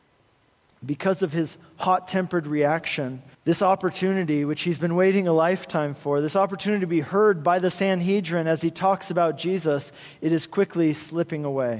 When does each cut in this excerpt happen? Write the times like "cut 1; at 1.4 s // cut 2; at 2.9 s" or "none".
cut 1; at 3.3 s